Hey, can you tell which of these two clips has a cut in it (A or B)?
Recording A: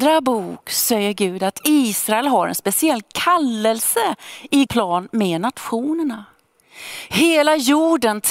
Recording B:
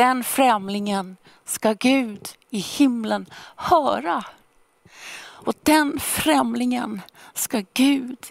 A